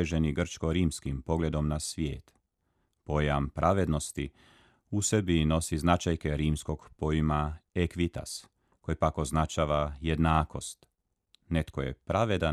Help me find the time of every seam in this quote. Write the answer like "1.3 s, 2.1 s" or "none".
none

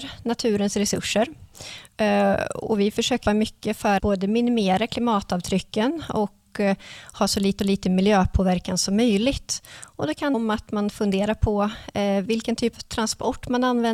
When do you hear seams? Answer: 3.3 s, 4.0 s, 7.6 s, 10.3 s, 12.7 s

